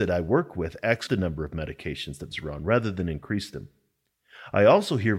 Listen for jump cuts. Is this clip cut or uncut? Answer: cut